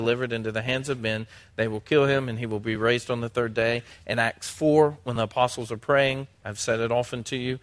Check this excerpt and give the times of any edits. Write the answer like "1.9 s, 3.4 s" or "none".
none